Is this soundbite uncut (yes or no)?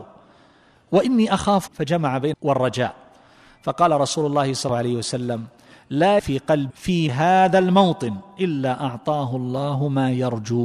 no